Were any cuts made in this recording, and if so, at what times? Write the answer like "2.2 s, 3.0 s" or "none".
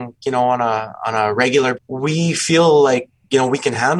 1.7 s